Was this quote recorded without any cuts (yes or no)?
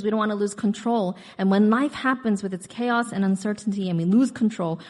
yes